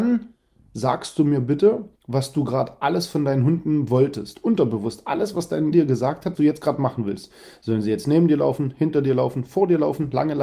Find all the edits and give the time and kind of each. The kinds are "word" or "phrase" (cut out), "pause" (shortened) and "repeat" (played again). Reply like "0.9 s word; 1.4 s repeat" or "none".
2.0 s pause; 5.7 s word; 6.3 s word